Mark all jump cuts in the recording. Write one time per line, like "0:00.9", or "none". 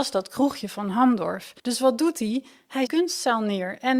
0:01.6
0:02.9